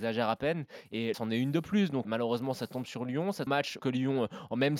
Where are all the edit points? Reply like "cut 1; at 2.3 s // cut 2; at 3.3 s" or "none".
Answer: cut 1; at 1.1 s // cut 2; at 2.0 s // cut 3; at 3.5 s // cut 4; at 3.8 s